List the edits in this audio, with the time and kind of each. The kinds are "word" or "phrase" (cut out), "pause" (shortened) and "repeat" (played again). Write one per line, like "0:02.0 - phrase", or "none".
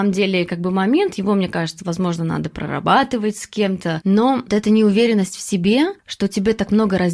0:04.5 - word